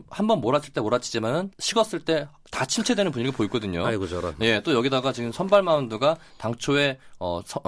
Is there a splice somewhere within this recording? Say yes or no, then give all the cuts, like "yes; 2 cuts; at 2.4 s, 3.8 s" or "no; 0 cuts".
yes; 1 cut; at 1.5 s